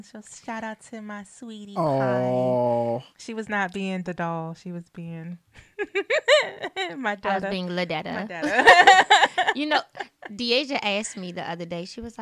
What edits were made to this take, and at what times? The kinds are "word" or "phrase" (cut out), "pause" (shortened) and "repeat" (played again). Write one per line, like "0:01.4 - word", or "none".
0:03.1 - pause
0:04.0 - word